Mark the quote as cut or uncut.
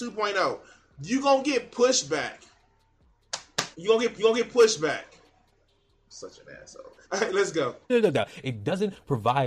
cut